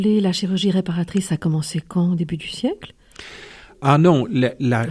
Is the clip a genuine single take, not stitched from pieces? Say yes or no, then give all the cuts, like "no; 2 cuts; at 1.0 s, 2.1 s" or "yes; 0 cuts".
yes; 0 cuts